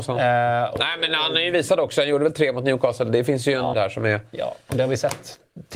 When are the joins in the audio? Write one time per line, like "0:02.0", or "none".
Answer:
0:03.7